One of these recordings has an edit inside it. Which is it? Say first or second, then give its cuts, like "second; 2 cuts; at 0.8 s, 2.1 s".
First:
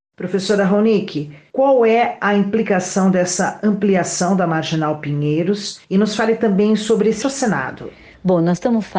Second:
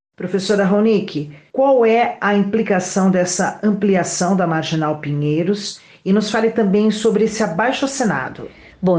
first; 2 cuts; at 5.8 s, 7.2 s